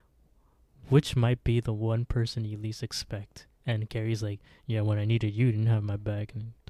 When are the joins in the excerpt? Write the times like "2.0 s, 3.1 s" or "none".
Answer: none